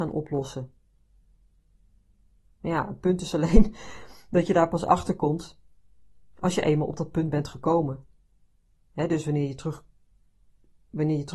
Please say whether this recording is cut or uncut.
uncut